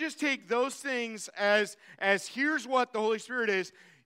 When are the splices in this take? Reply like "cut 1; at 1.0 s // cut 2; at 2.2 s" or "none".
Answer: none